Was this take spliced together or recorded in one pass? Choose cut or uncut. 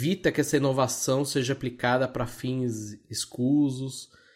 uncut